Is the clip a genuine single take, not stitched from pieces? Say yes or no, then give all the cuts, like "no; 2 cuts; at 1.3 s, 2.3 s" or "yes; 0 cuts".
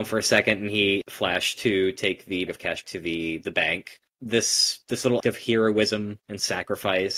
no; 5 cuts; at 1.0 s, 2.5 s, 2.8 s, 4.1 s, 5.2 s